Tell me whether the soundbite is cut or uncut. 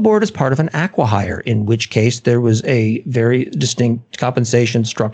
uncut